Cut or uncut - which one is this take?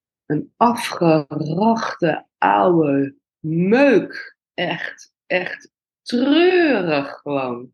cut